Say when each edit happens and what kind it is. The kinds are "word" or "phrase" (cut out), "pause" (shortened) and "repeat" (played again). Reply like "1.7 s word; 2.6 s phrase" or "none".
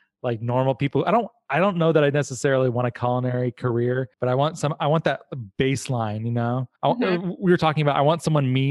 4.1 s pause; 6.8 s pause